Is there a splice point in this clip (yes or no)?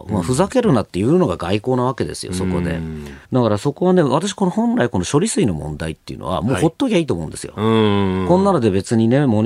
yes